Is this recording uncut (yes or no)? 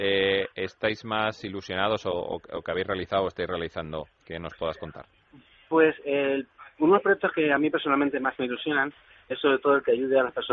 yes